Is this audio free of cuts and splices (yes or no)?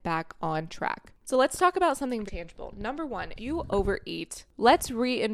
no